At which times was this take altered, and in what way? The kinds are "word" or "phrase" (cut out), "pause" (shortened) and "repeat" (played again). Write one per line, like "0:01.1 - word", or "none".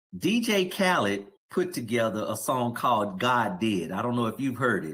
0:01.4 - pause

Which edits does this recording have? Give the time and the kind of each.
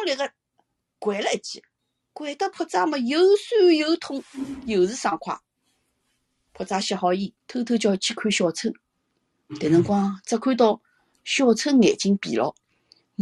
0:01.8 - pause
0:07.4 - pause

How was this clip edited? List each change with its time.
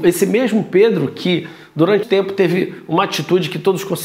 0:02.0 - word

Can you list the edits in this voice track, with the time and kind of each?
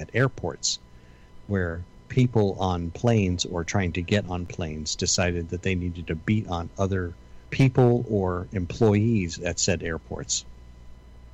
0:01.9 - pause
0:07.5 - pause

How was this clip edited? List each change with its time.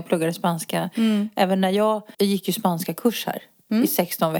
0:02.1 - pause

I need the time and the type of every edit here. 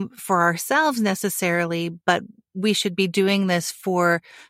0:02.0 - pause

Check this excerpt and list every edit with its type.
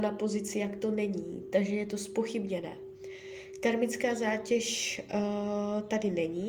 none

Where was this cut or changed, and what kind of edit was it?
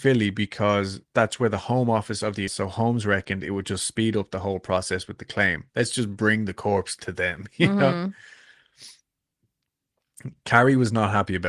0:01.0 - pause
0:02.5 - phrase
0:05.7 - pause

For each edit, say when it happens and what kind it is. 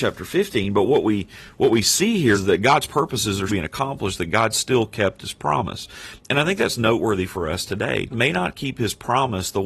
0:02.3 - word
0:03.5 - word
0:08.1 - phrase

